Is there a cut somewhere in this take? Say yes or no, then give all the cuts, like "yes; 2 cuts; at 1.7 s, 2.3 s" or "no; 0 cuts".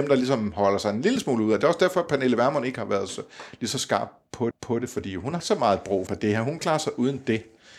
yes; 4 cuts; at 4.5 s, 5.4 s, 6.1 s, 6.6 s